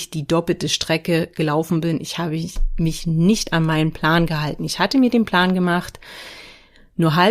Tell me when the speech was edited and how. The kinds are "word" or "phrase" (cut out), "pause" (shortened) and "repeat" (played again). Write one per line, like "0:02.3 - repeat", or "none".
none